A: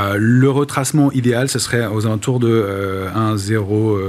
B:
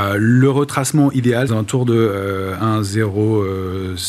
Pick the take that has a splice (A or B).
B